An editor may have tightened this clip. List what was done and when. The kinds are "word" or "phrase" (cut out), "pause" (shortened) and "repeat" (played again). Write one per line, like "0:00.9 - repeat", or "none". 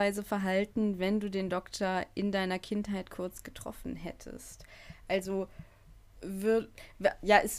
none